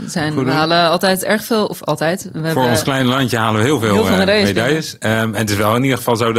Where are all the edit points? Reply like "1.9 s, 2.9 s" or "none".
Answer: none